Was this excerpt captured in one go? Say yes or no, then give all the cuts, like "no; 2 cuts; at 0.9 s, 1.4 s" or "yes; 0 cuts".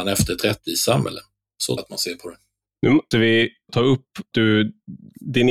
no; 4 cuts; at 1.8 s, 3.1 s, 3.7 s, 4.3 s